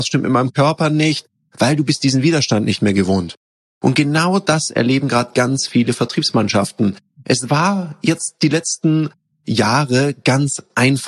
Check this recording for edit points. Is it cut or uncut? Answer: uncut